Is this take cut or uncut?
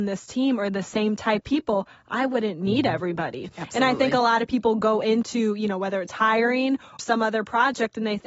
cut